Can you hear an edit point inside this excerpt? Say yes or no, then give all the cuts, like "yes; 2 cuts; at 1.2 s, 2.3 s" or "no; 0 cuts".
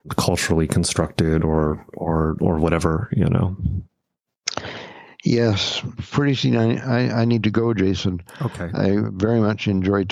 no; 0 cuts